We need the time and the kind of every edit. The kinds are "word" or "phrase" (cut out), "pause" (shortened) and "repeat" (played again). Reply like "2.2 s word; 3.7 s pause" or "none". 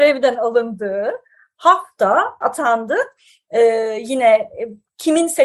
2.4 s phrase